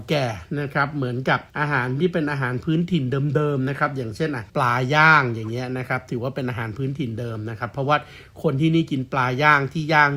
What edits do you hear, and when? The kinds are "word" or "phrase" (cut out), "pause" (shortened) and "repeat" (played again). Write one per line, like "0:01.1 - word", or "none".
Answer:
0:01.5 - pause
0:04.5 - pause